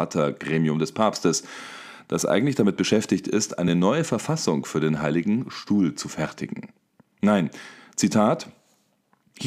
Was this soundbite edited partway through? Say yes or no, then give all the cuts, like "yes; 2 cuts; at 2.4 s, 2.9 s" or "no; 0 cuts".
no; 0 cuts